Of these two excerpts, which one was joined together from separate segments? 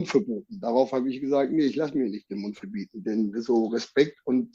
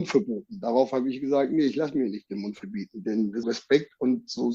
second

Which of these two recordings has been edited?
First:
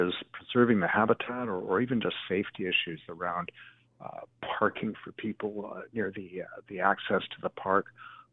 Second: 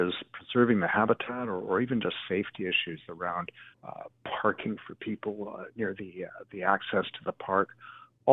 second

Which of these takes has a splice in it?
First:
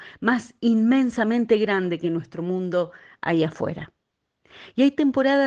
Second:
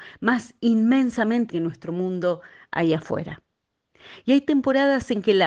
second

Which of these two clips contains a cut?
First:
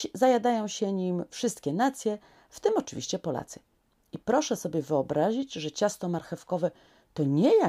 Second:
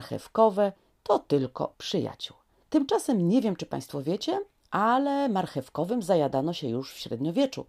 second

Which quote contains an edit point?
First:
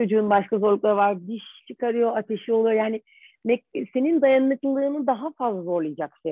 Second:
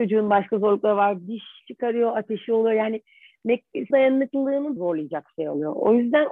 second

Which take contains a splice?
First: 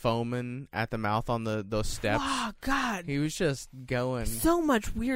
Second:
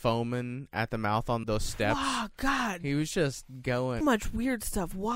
second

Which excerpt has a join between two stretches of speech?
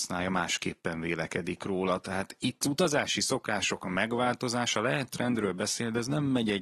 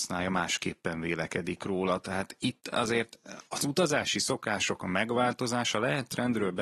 first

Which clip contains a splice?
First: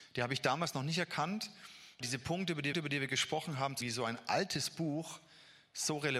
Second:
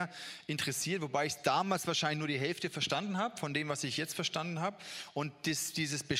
first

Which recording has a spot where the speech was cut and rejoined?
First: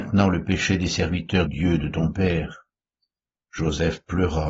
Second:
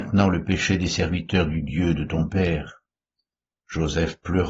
first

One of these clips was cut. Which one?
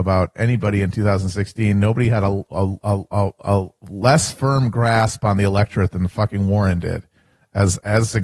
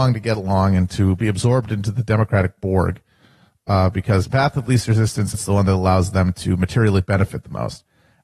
second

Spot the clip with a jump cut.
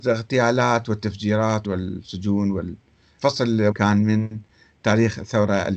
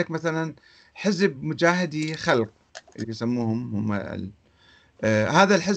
first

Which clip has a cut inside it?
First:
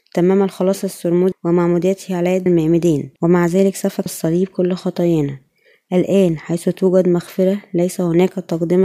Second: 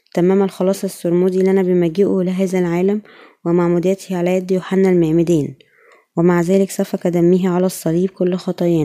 first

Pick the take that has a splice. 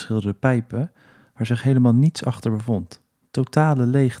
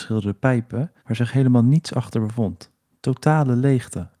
second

